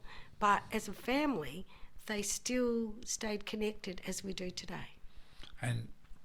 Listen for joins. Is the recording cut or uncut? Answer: uncut